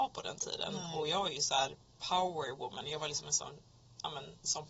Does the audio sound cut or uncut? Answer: uncut